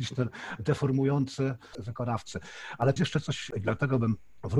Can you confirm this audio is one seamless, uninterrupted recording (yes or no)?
no